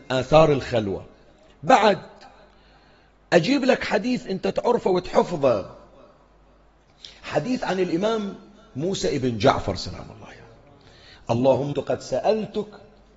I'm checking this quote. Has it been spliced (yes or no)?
yes